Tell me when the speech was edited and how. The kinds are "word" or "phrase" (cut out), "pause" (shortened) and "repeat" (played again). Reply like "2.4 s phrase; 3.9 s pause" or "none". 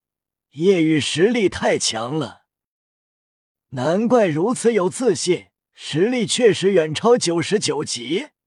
5.6 s pause